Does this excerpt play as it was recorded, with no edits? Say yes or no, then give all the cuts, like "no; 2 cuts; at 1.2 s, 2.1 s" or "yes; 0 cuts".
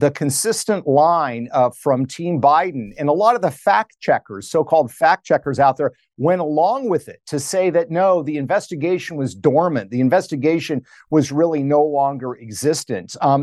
yes; 0 cuts